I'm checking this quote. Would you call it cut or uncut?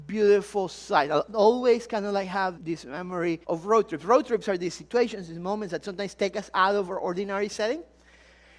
cut